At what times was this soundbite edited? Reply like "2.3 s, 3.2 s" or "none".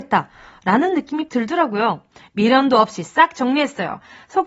1.3 s